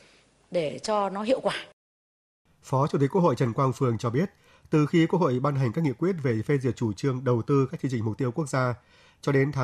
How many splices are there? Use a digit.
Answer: 0